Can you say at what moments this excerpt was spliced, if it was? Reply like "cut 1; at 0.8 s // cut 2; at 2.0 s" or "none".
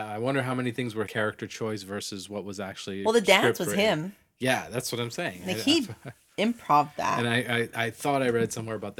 cut 1; at 1.1 s